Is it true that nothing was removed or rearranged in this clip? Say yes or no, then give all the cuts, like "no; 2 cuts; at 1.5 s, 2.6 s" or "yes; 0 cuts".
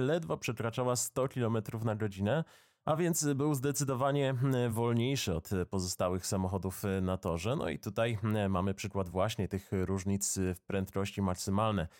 yes; 0 cuts